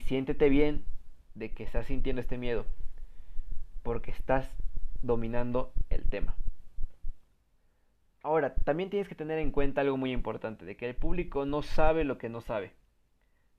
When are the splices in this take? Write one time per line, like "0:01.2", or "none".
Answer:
none